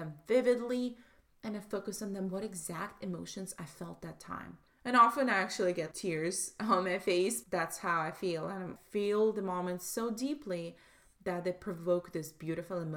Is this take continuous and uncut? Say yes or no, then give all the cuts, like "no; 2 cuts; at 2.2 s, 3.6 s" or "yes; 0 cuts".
no; 3 cuts; at 4.7 s, 5.9 s, 7.4 s